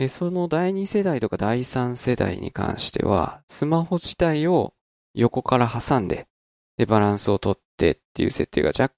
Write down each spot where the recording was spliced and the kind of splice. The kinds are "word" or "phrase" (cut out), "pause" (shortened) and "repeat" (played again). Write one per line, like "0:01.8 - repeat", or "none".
none